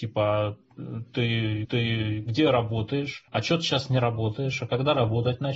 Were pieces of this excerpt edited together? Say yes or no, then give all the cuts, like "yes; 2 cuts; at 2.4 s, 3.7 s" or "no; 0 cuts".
yes; 2 cuts; at 1.6 s, 3.3 s